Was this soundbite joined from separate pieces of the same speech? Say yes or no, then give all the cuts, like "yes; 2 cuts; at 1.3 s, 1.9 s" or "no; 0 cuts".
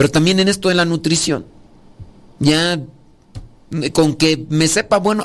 no; 0 cuts